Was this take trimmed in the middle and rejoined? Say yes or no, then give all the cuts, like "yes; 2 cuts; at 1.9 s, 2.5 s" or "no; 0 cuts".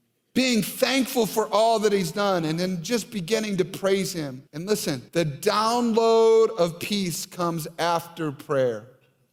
yes; 2 cuts; at 4.5 s, 5.1 s